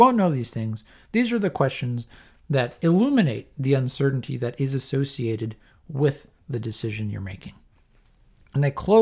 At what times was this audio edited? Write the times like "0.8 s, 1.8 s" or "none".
none